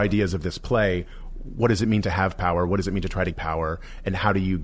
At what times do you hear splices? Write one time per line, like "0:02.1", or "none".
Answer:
0:03.3